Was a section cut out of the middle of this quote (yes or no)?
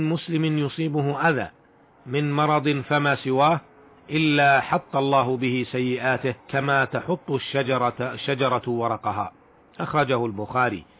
yes